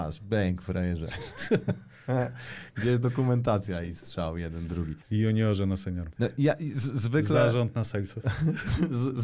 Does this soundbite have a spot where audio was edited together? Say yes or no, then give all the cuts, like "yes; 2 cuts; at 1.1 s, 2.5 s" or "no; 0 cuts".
no; 0 cuts